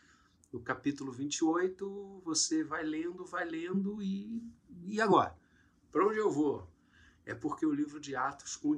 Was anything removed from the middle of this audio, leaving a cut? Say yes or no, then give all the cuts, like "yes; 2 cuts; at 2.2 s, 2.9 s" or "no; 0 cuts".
no; 0 cuts